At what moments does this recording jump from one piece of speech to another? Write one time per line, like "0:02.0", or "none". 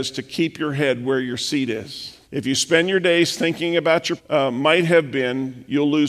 0:02.2
0:04.2